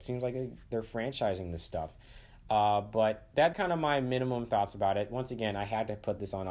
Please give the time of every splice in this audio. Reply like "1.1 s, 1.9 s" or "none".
3.5 s